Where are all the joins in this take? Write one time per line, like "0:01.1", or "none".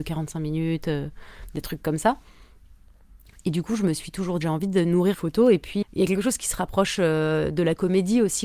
0:04.4
0:05.1
0:05.8

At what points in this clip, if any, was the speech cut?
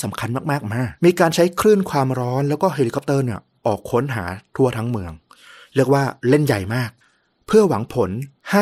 0:01.0
0:06.2

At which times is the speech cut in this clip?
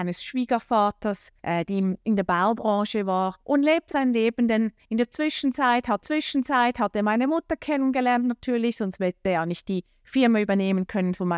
0:01.4
0:03.4
0:03.9
0:06.0

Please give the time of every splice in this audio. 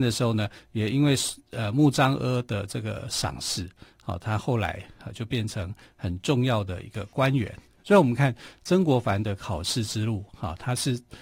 none

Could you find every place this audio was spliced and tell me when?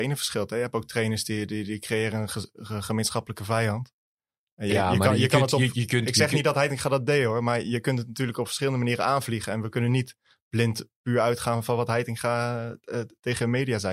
none

